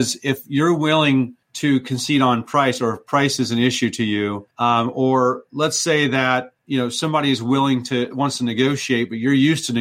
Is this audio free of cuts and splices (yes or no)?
no